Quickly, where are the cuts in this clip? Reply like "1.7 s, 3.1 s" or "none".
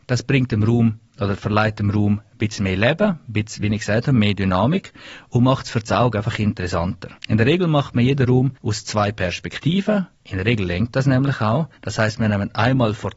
7.2 s, 8.6 s, 10.1 s, 11.8 s